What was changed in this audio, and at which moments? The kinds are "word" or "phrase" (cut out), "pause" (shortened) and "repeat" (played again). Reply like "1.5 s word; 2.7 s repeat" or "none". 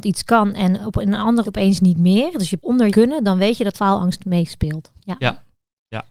1.4 s word; 2.6 s word; 2.9 s phrase; 3.7 s phrase